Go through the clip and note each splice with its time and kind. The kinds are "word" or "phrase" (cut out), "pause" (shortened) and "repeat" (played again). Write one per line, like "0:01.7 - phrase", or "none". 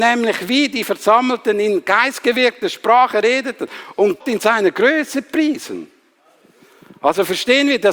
0:04.2 - word